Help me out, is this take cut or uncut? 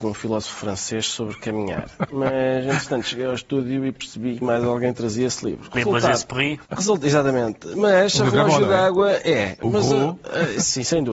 cut